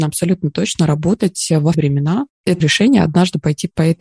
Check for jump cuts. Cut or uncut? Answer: cut